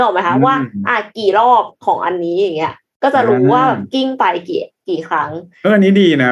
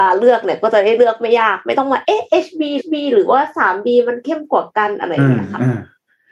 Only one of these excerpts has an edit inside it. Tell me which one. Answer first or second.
second